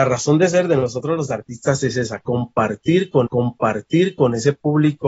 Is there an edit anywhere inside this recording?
yes; 1 cut; at 3.3 s

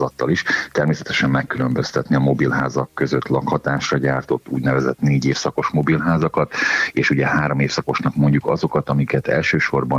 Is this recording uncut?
no; 1 cut; at 1.5 s

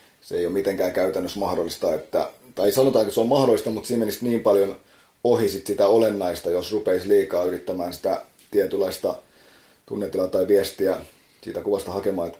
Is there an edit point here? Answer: no; 0 cuts

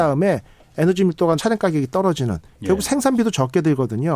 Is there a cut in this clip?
yes; 1 cut; at 1.4 s

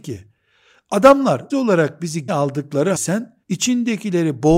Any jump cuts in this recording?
yes; 4 cuts; at 1.5 s, 2.3 s, 2.9 s, 3.4 s

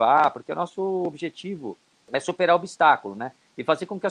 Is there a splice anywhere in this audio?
no; 0 cuts

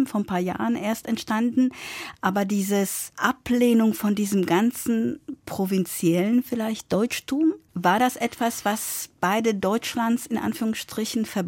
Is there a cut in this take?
no; 0 cuts

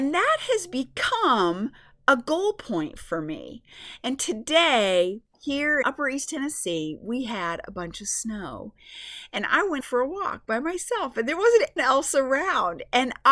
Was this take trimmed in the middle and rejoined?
yes; 3 cuts; at 5.8 s, 9.8 s, 11.8 s

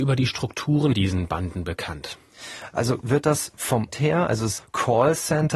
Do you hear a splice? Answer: yes; 4 cuts; at 0.9 s, 3.0 s, 3.9 s, 4.6 s

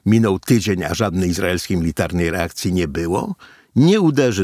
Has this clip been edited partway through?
no; 0 cuts

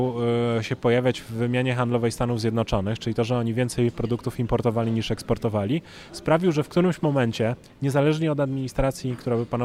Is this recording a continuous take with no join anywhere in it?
yes; 0 cuts

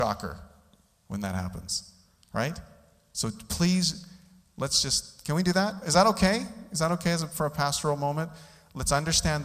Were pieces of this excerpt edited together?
no; 0 cuts

